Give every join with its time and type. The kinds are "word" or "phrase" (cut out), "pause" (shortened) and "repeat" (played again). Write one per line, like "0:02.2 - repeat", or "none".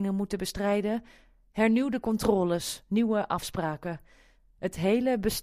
none